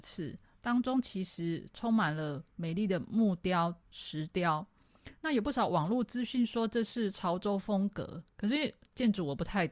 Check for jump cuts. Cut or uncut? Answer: cut